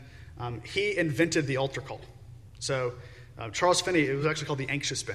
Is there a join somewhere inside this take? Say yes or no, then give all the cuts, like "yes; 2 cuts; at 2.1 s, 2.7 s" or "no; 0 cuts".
no; 0 cuts